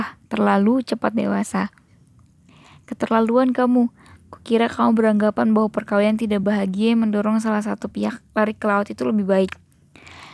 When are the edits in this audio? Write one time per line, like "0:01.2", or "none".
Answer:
none